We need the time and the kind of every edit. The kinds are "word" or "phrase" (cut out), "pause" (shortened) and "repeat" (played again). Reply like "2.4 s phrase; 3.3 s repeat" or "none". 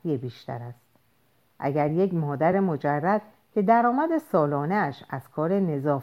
none

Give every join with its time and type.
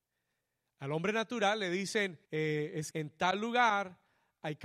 2.3 s pause; 2.9 s word

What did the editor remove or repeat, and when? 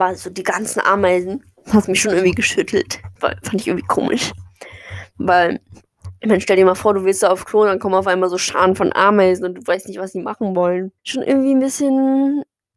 3.2 s pause; 11.0 s pause

